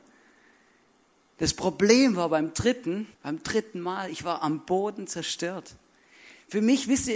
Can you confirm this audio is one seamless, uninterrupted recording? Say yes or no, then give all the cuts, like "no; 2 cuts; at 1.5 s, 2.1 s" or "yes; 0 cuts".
no; 1 cut; at 3.1 s